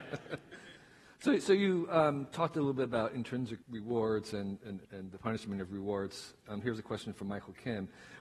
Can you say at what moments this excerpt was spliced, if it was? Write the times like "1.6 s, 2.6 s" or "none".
3.6 s, 4.8 s

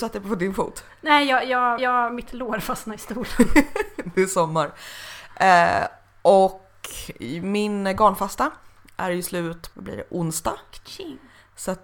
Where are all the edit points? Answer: 1.8 s, 9.7 s

